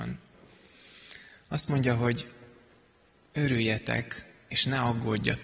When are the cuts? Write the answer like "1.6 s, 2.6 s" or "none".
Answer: none